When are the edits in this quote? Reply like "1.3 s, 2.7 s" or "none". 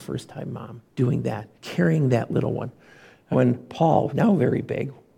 0.9 s, 1.5 s, 3.3 s, 4.1 s